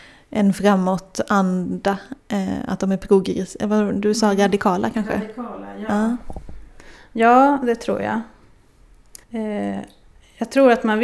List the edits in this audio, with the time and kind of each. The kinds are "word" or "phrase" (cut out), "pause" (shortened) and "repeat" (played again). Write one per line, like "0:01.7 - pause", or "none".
0:02.2 - pause
0:09.2 - pause